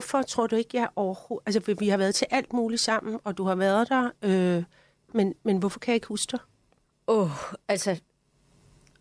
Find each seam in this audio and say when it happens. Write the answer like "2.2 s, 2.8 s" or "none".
none